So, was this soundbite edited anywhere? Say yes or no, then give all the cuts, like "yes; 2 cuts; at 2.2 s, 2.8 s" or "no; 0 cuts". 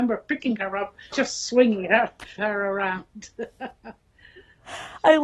yes; 2 cuts; at 1.1 s, 2.4 s